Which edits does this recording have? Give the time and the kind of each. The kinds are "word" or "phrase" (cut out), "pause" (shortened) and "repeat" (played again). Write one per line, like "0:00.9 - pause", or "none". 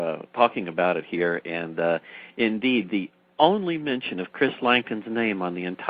none

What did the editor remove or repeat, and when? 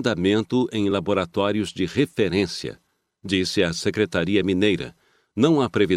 none

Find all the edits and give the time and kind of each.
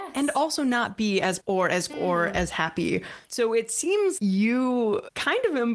0:01.4 - word
0:01.9 - word
0:04.2 - word

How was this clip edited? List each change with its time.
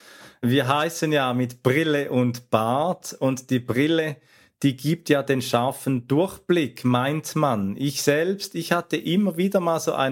none

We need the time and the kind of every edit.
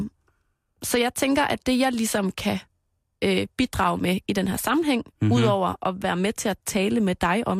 none

